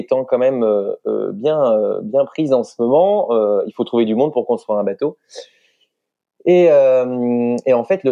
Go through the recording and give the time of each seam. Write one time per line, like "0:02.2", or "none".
none